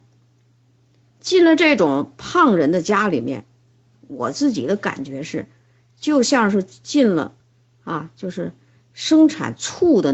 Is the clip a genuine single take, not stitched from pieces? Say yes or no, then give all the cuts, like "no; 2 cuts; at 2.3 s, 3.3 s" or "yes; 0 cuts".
yes; 0 cuts